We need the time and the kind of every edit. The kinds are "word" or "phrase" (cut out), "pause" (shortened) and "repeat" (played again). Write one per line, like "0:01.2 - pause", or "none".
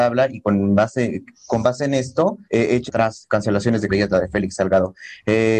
0:02.4 - pause
0:02.9 - word
0:03.3 - word
0:03.9 - phrase